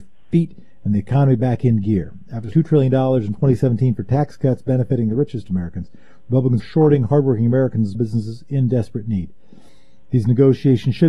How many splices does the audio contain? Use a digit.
3